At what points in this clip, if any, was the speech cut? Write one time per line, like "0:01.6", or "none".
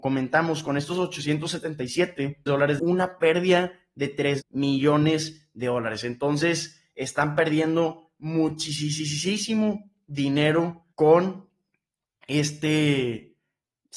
0:02.5
0:02.8
0:04.4
0:10.9